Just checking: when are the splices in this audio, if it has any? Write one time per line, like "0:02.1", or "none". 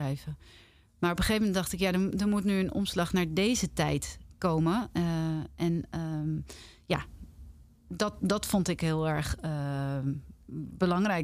none